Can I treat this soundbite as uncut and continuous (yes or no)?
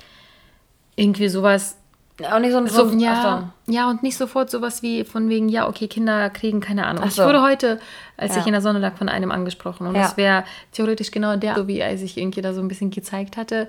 no